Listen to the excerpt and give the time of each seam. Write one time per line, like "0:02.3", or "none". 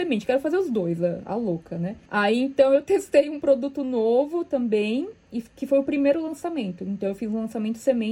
0:02.1